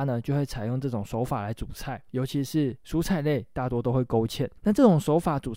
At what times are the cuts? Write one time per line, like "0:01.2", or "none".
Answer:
0:02.1
0:04.6